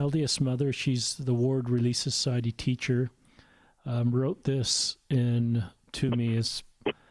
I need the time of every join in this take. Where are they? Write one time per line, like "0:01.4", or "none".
none